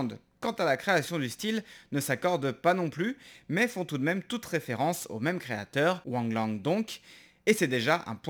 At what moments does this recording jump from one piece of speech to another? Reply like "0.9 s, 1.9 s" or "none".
none